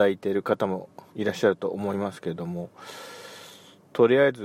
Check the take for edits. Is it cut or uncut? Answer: cut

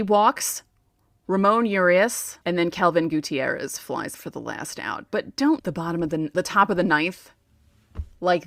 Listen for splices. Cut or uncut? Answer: cut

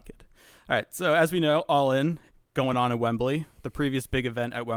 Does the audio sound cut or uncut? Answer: uncut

